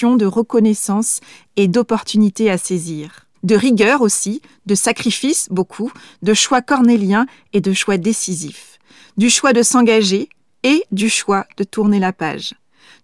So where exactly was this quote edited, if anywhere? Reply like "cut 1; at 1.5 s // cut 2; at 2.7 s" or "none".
cut 1; at 3.3 s